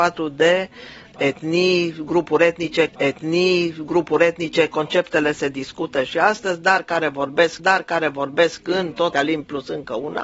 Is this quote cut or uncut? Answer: cut